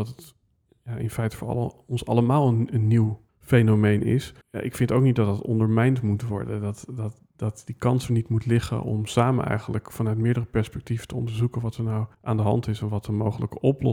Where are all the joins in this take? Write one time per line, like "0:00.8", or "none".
0:03.3
0:04.4
0:12.1